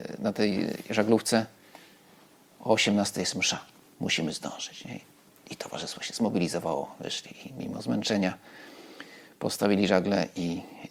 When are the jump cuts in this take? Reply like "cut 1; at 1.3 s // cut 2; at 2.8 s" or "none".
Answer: none